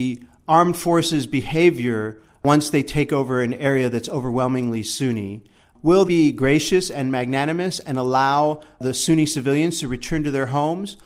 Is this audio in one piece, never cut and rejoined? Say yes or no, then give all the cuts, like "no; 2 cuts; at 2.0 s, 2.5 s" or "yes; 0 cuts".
no; 1 cut; at 6.0 s